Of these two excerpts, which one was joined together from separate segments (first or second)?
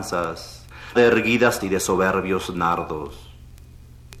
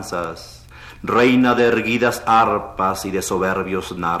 first